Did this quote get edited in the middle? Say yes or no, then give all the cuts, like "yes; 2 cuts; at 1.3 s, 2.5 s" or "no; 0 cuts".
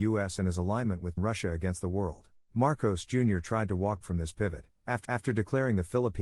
yes; 4 cuts; at 1.2 s, 2.4 s, 4.0 s, 5.0 s